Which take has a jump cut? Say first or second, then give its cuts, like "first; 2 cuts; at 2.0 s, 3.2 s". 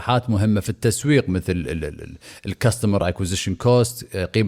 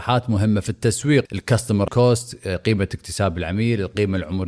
second; 2 cuts; at 1.3 s, 1.9 s